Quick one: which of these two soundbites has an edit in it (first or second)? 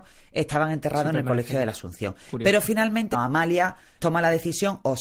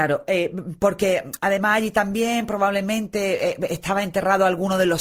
first